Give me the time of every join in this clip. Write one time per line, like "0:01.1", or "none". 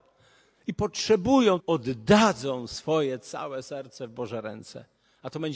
0:01.6

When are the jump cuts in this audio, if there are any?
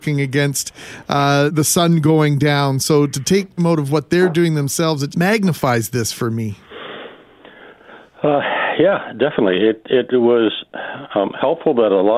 0:01.5
0:03.6
0:05.1

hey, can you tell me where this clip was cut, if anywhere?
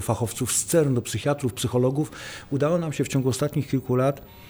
none

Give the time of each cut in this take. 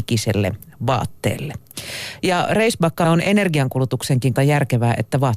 0:03.0
0:04.4

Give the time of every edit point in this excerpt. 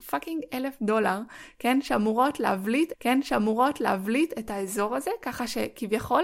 0:02.9

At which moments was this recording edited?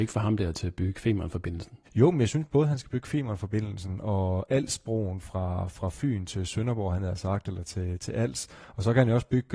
0:01.8

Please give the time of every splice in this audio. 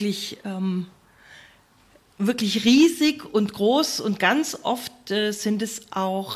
none

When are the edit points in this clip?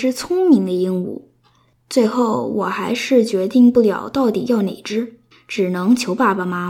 0:05.3

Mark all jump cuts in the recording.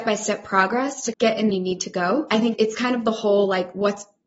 0:01.1
0:01.5
0:02.5

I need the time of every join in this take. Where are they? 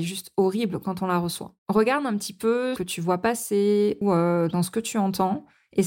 0:01.6
0:02.8
0:04.0

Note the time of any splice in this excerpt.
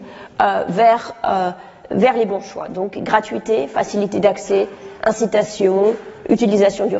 none

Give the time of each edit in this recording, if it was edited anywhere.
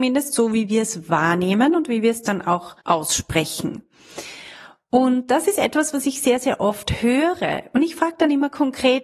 0:02.8

